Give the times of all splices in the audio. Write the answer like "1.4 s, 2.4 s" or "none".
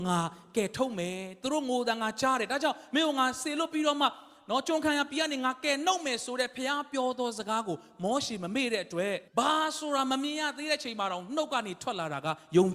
9.3 s